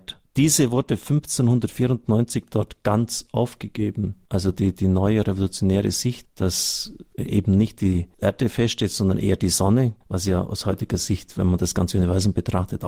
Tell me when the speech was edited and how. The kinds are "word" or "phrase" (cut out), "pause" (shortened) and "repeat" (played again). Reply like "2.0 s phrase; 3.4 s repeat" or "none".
none